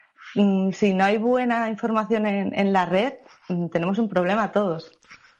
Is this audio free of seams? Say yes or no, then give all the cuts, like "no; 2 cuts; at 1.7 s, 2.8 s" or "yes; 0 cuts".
yes; 0 cuts